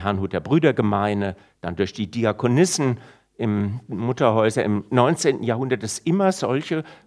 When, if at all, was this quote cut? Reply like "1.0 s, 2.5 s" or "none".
none